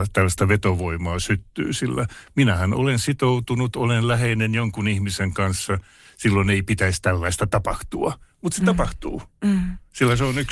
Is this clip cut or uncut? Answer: uncut